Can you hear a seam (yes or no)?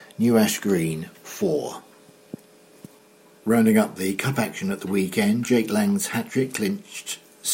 no